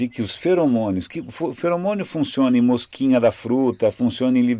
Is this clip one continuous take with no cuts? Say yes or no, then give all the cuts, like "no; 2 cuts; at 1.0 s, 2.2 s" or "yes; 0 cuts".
yes; 0 cuts